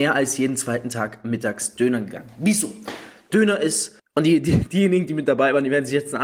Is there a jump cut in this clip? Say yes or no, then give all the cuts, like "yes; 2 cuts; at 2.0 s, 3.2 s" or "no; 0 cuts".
yes; 1 cut; at 4.0 s